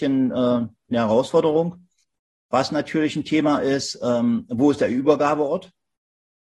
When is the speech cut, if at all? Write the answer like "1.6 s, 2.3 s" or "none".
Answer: 2.0 s